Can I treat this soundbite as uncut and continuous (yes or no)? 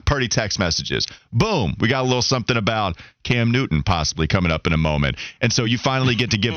yes